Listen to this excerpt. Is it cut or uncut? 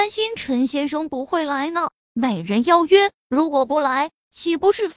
cut